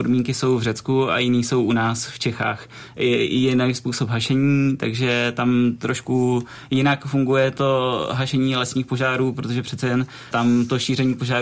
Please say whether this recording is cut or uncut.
cut